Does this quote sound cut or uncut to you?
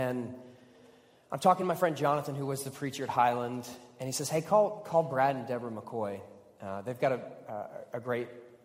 uncut